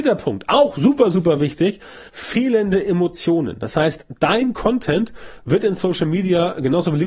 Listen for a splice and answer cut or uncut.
cut